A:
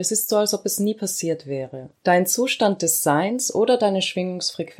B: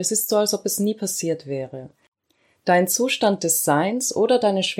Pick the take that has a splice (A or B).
A